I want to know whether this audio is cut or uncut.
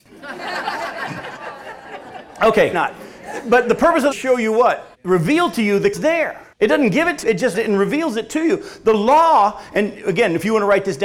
cut